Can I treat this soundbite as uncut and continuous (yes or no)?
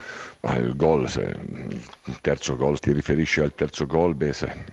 no